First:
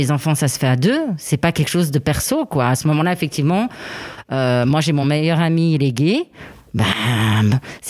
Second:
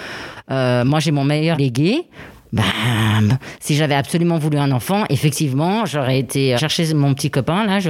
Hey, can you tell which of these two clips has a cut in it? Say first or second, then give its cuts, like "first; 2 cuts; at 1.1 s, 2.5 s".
second; 2 cuts; at 1.5 s, 6.6 s